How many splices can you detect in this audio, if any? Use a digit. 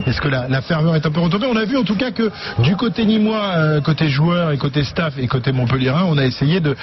0